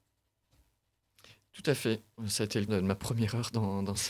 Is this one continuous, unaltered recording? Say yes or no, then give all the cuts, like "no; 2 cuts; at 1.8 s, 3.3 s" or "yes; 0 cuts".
no; 1 cut; at 2.7 s